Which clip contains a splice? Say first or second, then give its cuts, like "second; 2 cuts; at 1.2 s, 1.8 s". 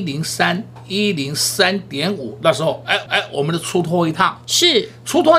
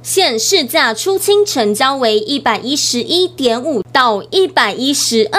first; 1 cut; at 3.1 s